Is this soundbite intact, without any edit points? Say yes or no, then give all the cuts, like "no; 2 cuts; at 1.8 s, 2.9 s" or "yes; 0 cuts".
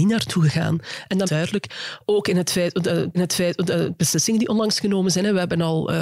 no; 2 cuts; at 1.2 s, 3.1 s